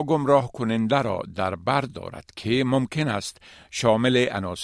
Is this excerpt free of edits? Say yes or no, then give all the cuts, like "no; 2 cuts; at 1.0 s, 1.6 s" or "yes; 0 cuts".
yes; 0 cuts